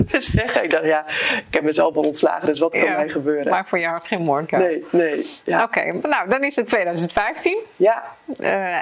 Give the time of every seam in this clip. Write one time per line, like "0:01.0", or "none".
none

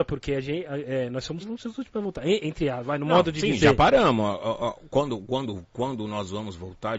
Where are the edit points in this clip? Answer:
0:01.4

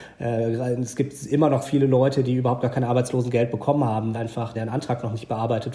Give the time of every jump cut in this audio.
0:01.6
0:04.1
0:04.5

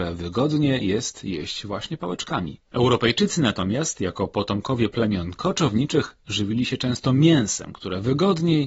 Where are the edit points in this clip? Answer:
0:02.7

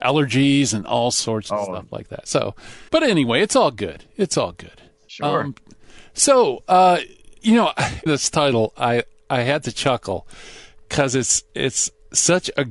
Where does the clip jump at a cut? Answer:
0:02.9
0:08.1

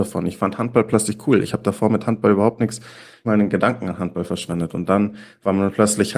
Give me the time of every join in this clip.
0:03.2

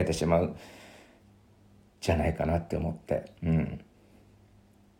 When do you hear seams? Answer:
0:03.4

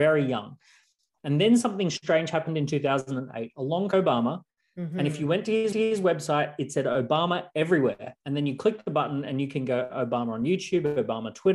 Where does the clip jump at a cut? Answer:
0:03.9
0:05.7
0:08.2

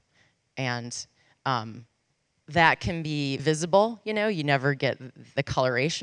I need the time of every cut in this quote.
0:02.2
0:03.4

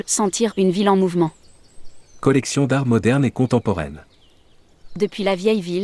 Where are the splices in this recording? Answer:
none

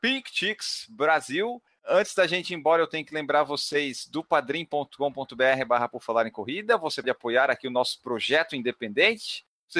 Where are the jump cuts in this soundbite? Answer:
0:07.0

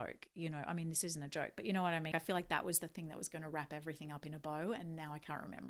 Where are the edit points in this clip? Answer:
0:02.1

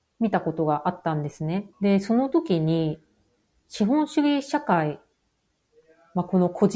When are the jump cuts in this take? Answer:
0:01.7

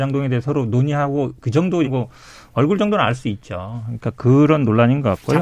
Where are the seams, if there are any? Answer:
0:01.8

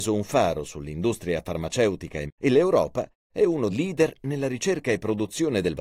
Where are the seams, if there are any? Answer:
0:02.3
0:03.7

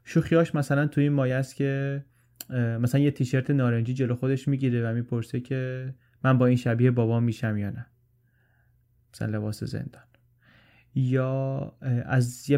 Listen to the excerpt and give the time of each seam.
none

